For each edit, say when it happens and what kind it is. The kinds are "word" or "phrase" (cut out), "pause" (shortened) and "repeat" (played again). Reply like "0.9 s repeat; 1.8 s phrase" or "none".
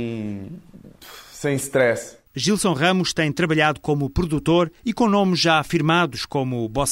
4.8 s pause